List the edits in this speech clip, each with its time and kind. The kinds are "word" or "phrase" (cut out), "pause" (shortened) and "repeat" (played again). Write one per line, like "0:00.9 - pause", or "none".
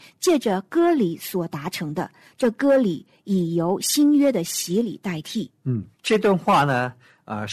0:05.9 - pause